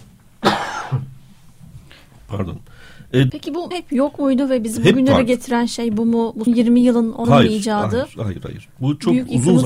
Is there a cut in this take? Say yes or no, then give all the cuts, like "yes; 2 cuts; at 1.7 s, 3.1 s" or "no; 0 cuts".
yes; 4 cuts; at 3.3 s, 3.7 s, 6.5 s, 7.2 s